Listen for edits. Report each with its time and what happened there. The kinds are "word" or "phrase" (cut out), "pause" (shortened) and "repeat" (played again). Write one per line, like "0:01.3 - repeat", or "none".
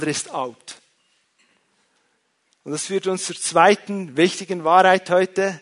none

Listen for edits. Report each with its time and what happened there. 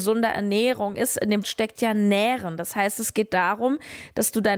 0:01.4 - word

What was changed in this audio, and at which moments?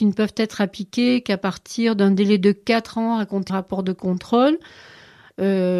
0:03.5 - phrase

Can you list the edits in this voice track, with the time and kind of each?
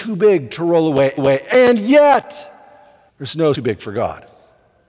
0:01.2 - repeat
0:03.1 - pause
0:03.5 - phrase

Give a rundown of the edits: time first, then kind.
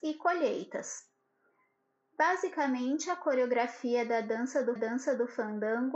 0:04.8 - repeat

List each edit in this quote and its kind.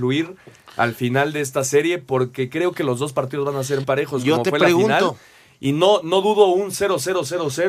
0:03.8 - word

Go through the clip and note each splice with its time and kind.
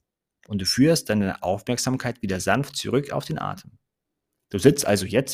none

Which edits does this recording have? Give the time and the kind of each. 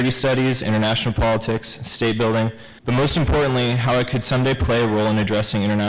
0:02.8 - pause

